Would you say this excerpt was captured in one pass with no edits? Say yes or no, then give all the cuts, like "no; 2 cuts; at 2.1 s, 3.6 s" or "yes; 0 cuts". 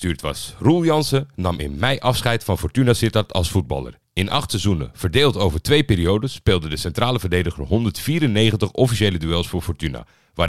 yes; 0 cuts